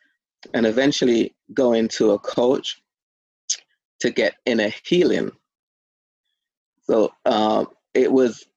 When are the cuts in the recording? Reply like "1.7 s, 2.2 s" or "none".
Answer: none